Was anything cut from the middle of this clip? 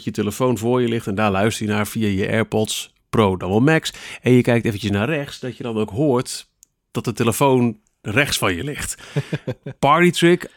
no; 0 cuts

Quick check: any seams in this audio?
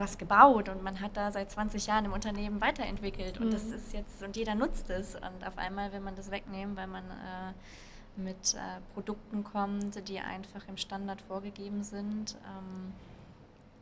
no; 0 cuts

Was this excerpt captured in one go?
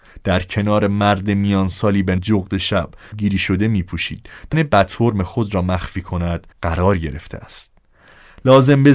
no; 4 cuts; at 2.2 s, 3.1 s, 4.5 s, 6.5 s

